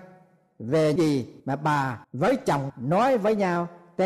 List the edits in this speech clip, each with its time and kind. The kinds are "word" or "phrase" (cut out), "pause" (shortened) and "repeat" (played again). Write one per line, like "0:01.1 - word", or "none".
0:01.0 - word
0:01.4 - pause
0:02.0 - pause
0:02.7 - word